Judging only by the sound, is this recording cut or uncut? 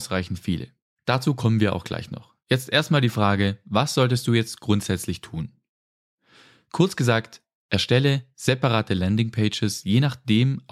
uncut